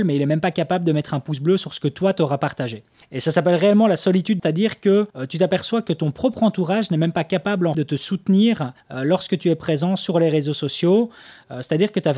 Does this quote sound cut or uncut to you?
cut